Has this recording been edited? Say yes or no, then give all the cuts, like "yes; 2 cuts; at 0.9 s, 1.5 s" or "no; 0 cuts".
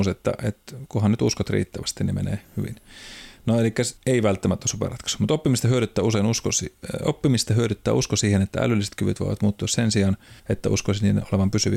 yes; 2 cuts; at 4.0 s, 10.4 s